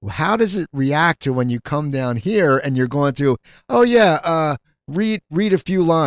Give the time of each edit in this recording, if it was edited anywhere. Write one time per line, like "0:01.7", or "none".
none